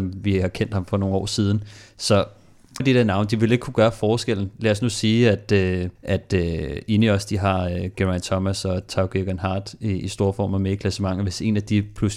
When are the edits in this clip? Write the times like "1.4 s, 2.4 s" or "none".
2.8 s, 6.0 s